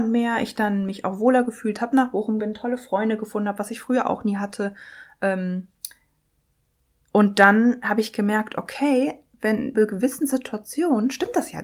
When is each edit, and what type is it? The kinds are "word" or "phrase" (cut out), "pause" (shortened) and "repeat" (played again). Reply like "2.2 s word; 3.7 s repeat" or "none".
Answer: 2.4 s word; 9.7 s word